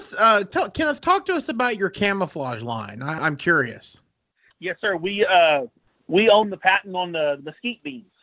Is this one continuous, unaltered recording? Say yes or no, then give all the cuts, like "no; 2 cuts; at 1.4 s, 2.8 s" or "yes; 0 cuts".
no; 1 cut; at 3.2 s